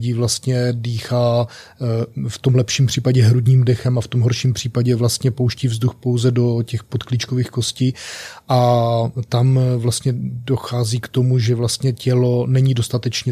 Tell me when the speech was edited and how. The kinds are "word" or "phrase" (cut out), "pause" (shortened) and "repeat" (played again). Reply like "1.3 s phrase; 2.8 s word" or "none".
none

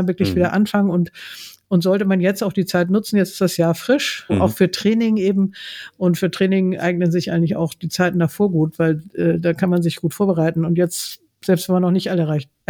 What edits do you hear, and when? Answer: 4.3 s word

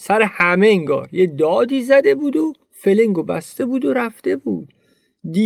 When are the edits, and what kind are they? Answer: 2.6 s pause

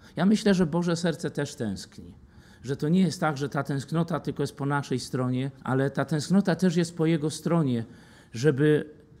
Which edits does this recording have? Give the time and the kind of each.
5.6 s pause

